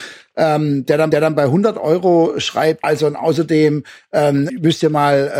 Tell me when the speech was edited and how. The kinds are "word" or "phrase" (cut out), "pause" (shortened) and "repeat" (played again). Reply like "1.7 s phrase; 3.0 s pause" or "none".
1.1 s repeat; 2.8 s word; 4.5 s word